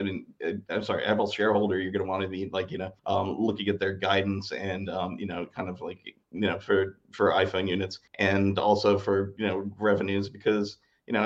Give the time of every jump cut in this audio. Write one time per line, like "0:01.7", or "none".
0:03.0
0:06.2
0:08.1